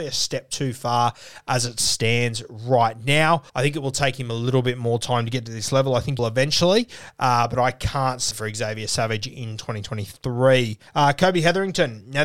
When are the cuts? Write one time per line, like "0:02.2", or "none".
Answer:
0:03.5
0:06.2
0:08.3
0:10.9